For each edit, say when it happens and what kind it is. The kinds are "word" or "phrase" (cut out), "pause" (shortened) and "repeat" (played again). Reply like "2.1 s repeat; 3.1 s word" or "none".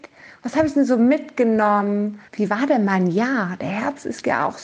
2.3 s pause